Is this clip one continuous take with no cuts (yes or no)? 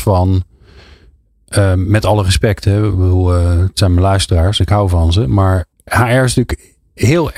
no